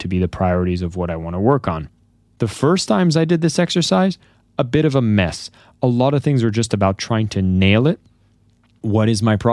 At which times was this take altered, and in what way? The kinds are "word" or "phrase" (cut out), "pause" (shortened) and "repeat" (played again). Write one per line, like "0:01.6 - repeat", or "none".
none